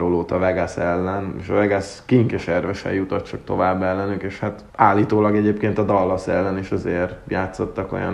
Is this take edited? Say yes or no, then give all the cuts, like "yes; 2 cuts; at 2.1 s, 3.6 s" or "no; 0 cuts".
yes; 1 cut; at 4.7 s